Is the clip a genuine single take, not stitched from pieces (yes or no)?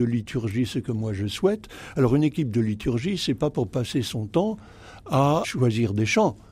yes